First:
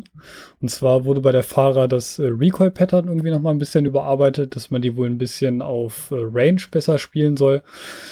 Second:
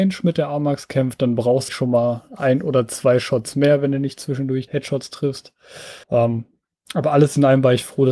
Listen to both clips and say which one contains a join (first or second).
second